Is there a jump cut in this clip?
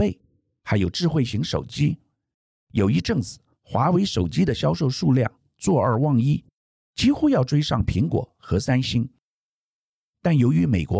no; 0 cuts

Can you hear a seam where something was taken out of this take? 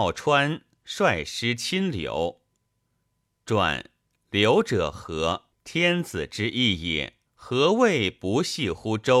yes; 3 cuts; at 4.1 s, 5.5 s, 7.3 s

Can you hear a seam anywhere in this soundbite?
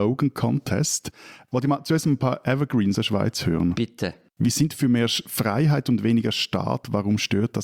yes; 1 cut; at 2.9 s

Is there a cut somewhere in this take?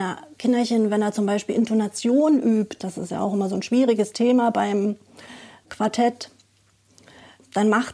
no; 0 cuts

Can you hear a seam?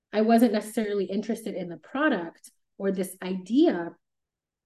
no; 0 cuts

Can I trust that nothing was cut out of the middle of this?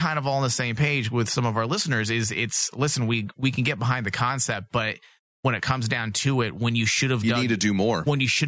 yes; 0 cuts

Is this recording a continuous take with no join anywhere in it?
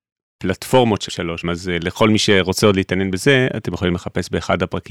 no; 2 cuts; at 1.1 s, 1.4 s

